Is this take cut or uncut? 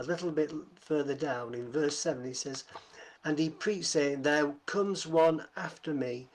cut